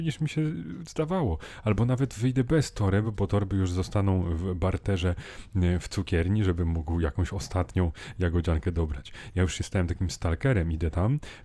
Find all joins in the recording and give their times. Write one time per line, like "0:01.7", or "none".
none